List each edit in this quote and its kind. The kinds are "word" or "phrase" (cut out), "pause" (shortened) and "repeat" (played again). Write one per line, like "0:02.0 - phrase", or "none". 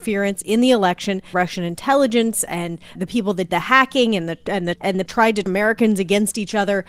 0:01.3 - word
0:02.9 - word
0:03.5 - word
0:04.7 - word
0:05.1 - phrase
0:05.5 - word